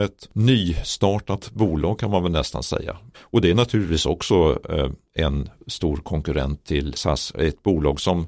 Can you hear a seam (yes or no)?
no